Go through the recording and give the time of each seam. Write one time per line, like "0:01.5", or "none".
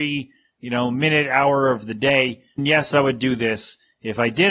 0:02.6